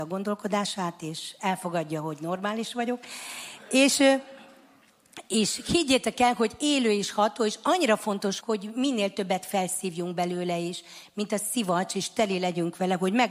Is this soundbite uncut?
no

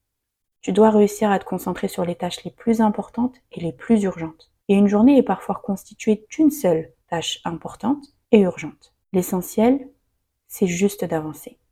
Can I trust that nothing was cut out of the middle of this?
no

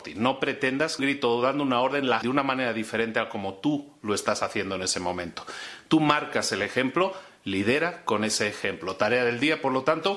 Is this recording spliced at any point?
yes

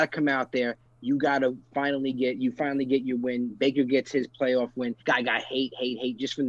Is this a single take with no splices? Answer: no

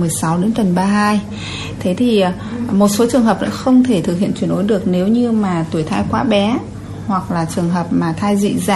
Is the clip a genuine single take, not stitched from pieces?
yes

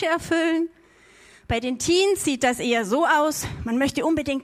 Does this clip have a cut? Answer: no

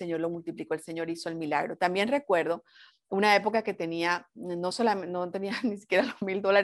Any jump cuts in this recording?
no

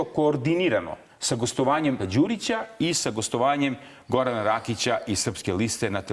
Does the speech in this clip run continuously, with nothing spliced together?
no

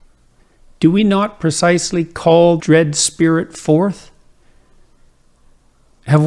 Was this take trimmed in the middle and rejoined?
yes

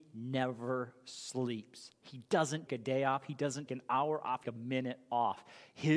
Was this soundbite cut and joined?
yes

